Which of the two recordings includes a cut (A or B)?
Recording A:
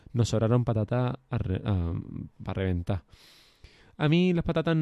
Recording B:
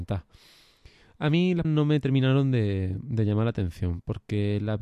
B